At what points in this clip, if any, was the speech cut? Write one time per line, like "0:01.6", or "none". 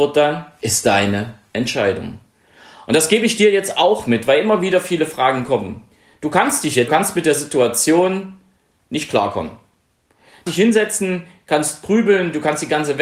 0:06.9
0:10.5

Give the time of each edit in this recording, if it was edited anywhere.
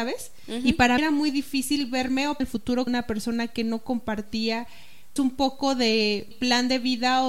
0:01.0
0:02.4
0:02.9
0:05.2
0:06.3

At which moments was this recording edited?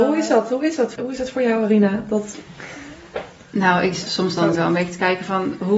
0:01.0
0:04.6

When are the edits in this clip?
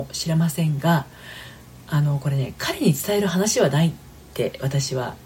0:01.8

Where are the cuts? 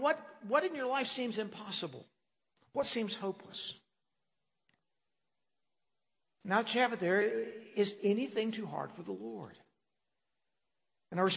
none

